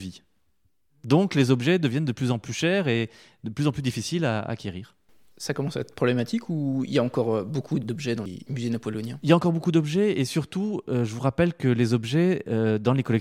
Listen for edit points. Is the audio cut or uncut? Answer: uncut